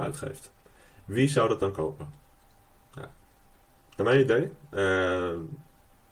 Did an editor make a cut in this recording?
no; 0 cuts

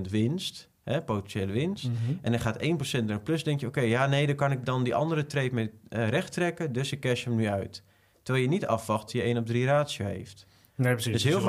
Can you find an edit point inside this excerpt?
yes; 1 cut; at 9.1 s

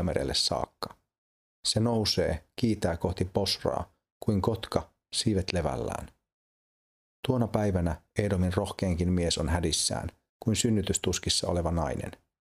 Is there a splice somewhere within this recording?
no; 0 cuts

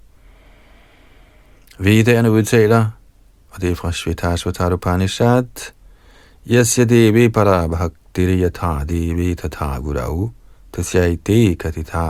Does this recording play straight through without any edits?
yes; 0 cuts

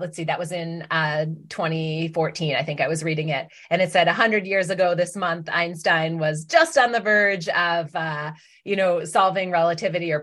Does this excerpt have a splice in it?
no; 0 cuts

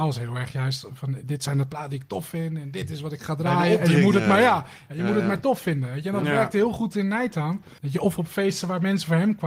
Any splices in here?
yes; 1 cut; at 7.8 s

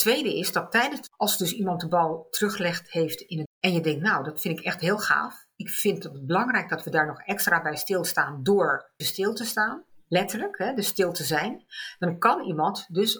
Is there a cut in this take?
yes; 3 cuts; at 1.1 s, 3.4 s, 9.0 s

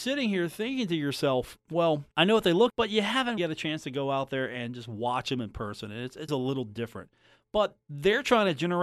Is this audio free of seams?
no; 5 cuts; at 2.1 s, 2.7 s, 3.4 s, 6.3 s, 7.8 s

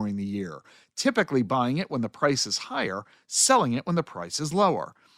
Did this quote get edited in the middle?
no; 0 cuts

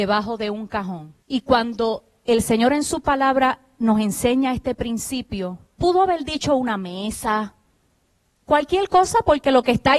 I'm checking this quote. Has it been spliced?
yes; 1 cut; at 1.2 s

